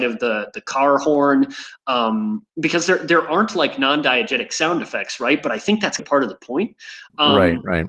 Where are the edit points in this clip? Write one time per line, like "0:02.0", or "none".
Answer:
0:02.5
0:06.0